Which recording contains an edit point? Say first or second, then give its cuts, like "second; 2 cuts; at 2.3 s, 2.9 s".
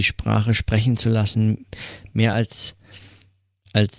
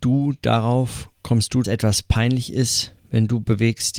second; 1 cut; at 1.6 s